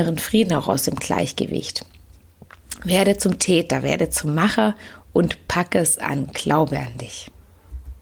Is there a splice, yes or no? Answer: no